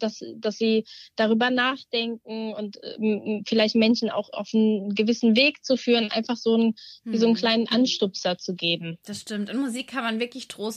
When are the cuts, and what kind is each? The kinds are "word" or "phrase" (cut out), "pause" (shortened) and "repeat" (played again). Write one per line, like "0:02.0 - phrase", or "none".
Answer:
none

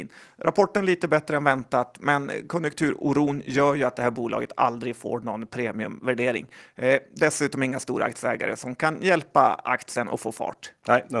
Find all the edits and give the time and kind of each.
none

